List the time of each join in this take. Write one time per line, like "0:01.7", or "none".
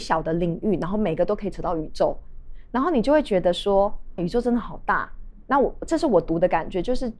0:04.2